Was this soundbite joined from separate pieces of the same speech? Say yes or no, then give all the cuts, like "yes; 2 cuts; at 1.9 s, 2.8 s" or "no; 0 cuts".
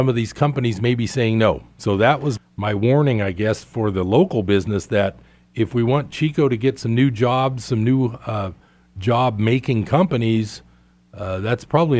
yes; 1 cut; at 2.4 s